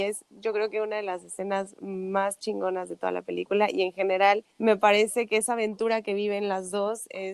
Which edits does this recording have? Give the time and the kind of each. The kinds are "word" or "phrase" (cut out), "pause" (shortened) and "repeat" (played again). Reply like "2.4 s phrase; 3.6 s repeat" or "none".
4.5 s pause